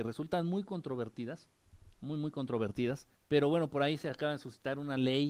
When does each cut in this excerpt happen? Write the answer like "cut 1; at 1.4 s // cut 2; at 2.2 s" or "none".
cut 1; at 3.2 s